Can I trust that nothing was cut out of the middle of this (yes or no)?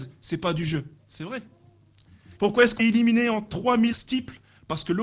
no